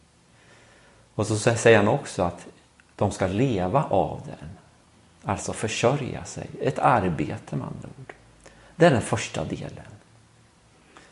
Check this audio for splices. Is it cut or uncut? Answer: uncut